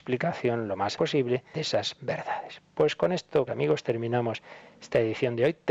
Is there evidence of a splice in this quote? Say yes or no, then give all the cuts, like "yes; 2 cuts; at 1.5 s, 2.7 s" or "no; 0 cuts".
yes; 3 cuts; at 1.0 s, 1.5 s, 3.5 s